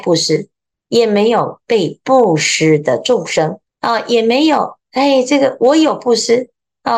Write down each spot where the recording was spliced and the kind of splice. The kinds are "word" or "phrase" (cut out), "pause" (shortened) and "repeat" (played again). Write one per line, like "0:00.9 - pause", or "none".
0:03.7 - pause
0:04.8 - pause